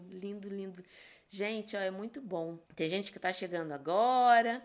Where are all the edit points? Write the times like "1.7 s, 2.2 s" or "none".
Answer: 2.7 s